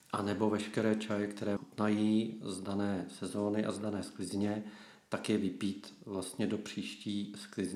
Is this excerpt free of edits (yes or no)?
no